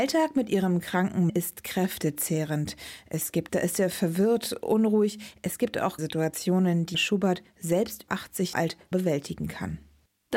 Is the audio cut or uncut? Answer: cut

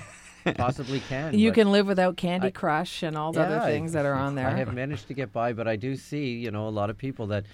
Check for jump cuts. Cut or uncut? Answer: cut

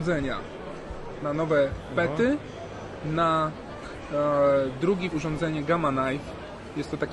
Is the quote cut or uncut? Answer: cut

